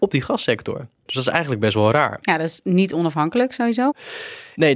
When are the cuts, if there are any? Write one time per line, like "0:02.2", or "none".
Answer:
none